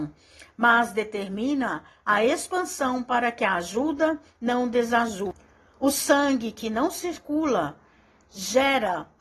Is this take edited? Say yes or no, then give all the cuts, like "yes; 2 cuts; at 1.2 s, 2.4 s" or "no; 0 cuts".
no; 0 cuts